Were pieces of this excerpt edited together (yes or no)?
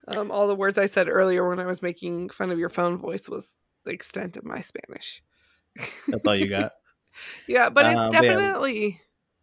no